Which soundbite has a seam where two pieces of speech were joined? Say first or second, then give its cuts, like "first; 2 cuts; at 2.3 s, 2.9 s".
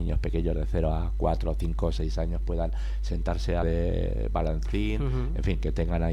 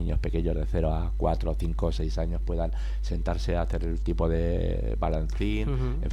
first; 1 cut; at 3.6 s